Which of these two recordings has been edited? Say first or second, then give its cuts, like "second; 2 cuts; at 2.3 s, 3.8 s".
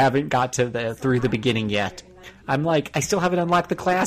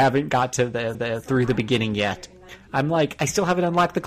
second; 1 cut; at 0.9 s